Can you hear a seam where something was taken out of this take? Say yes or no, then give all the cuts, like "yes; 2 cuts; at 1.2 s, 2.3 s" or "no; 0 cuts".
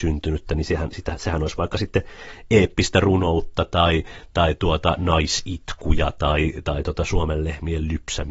no; 0 cuts